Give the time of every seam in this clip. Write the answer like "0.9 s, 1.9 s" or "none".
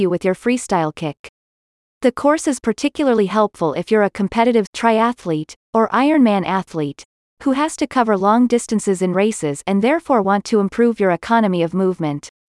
4.7 s